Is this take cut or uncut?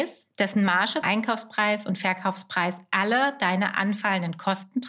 cut